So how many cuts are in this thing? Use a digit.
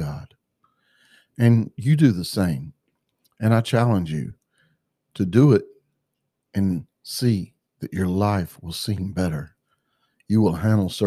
0